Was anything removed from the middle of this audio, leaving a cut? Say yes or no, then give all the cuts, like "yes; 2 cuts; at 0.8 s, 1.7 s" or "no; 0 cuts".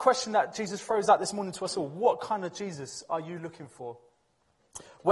no; 0 cuts